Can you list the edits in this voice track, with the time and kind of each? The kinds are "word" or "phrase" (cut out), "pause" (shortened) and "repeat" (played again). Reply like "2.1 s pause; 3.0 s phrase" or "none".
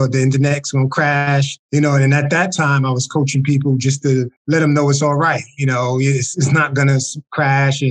1.6 s pause; 4.4 s pause